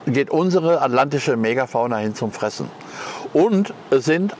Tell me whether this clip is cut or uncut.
uncut